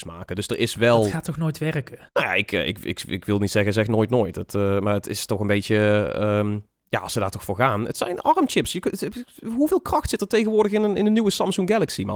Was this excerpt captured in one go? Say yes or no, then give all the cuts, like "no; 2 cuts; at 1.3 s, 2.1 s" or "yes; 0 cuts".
no; 1 cut; at 2.1 s